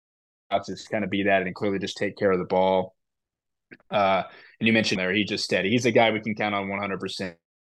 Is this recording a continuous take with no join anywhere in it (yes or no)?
no